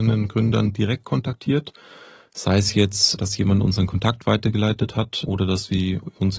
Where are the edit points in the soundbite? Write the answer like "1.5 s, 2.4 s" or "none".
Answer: none